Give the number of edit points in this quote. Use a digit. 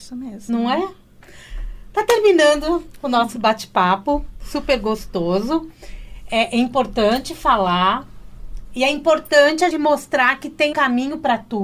2